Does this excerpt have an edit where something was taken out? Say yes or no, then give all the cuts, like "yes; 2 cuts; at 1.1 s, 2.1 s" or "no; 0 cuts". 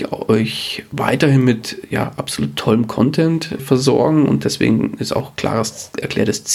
yes; 1 cut; at 3.6 s